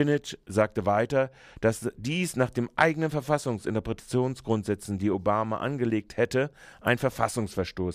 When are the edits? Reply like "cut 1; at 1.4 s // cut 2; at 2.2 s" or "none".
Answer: none